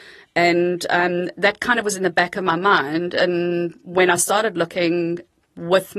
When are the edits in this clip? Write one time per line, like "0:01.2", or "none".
none